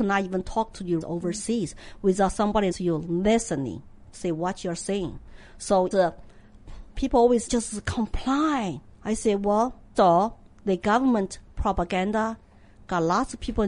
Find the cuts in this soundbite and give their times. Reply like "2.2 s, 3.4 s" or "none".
1.0 s, 2.7 s, 5.9 s, 6.9 s, 7.5 s, 8.9 s, 9.9 s

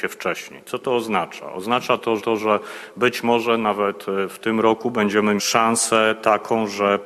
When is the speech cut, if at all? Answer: 2.2 s, 5.4 s

